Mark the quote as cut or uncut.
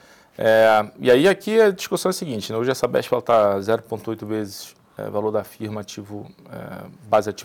uncut